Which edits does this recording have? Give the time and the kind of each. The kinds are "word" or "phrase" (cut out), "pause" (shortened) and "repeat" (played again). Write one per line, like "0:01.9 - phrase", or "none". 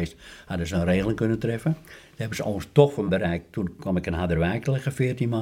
0:03.1 - word